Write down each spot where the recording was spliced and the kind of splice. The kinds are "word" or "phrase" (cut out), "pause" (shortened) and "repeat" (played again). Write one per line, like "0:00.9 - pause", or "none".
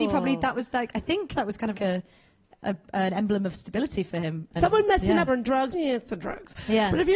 0:01.7 - word
0:05.3 - phrase
0:05.7 - word